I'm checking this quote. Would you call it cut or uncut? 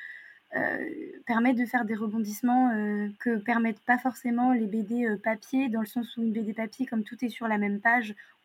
cut